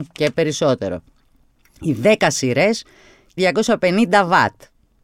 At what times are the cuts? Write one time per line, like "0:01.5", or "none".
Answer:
0:03.4

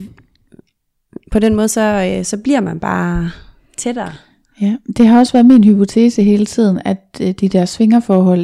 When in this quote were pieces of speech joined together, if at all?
none

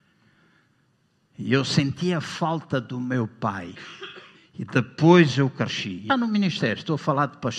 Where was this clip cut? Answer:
0:04.3
0:06.1

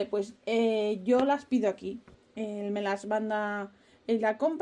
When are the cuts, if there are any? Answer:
none

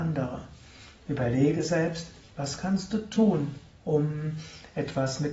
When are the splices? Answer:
none

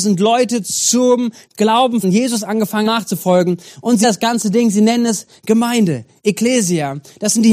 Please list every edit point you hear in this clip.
0:02.0
0:02.9
0:04.0

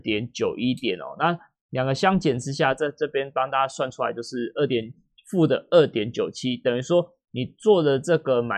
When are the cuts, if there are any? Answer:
none

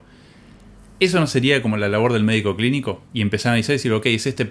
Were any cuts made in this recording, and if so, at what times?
0:03.1

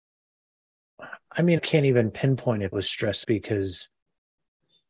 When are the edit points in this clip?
0:01.6
0:02.7
0:03.2

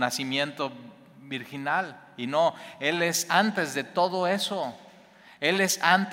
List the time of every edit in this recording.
none

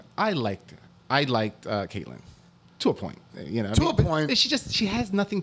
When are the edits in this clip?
none

